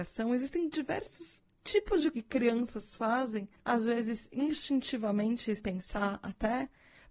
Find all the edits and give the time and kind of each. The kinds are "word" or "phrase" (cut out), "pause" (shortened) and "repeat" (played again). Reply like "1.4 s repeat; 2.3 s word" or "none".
2.1 s word; 5.6 s word